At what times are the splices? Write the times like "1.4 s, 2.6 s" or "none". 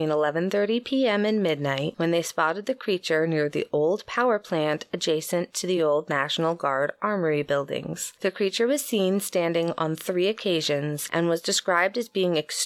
none